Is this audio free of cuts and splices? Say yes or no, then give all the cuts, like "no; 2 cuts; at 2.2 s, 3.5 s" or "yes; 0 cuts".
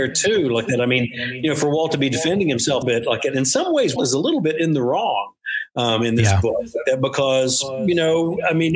no; 2 cuts; at 2.8 s, 4.0 s